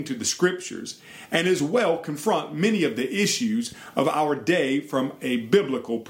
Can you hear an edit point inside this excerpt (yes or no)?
no